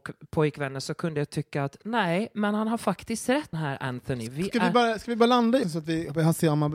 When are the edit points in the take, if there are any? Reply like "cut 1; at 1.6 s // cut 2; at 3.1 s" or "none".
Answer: cut 1; at 3.5 s // cut 2; at 5.6 s